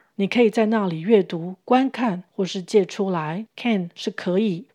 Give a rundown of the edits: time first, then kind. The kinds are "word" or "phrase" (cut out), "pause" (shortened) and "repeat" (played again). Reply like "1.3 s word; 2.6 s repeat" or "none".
2.3 s pause

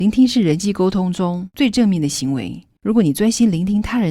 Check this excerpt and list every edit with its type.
2.8 s pause

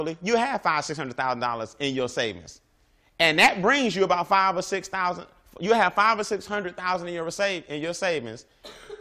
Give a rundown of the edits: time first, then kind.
none

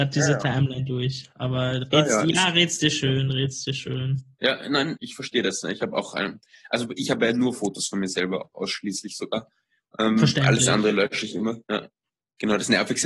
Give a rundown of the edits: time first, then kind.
5.0 s word

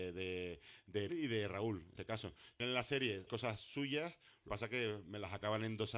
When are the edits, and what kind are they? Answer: 1.1 s word; 2.0 s word; 2.6 s word; 3.3 s word; 4.5 s word

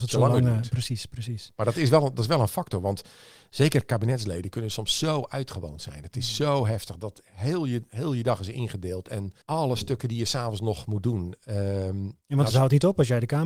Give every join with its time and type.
9.4 s pause

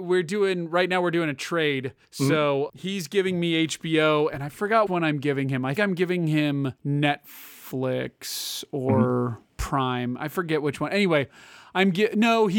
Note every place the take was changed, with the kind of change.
2.0 s pause; 2.7 s word; 4.9 s word; 5.8 s word; 6.8 s pause; 9.4 s pause

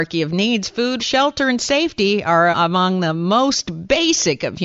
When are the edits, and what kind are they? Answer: 1.0 s word; 2.5 s word

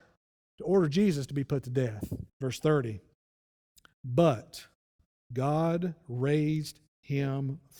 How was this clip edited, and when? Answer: 2.3 s pause; 3.6 s pause

